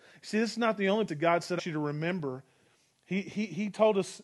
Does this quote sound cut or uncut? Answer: cut